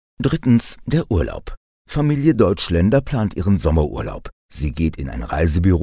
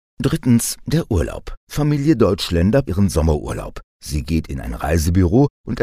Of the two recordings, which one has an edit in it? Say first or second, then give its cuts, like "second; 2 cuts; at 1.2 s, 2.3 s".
second; 2 cuts; at 1.6 s, 2.8 s